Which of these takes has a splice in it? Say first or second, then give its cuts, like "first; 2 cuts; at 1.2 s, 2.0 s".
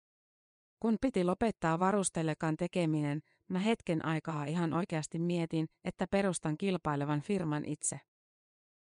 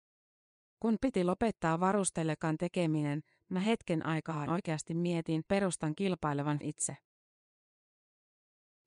second; 3 cuts; at 4.5 s, 5.5 s, 6.6 s